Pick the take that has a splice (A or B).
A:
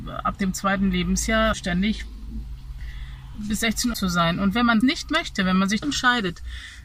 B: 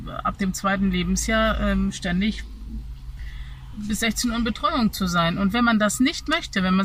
A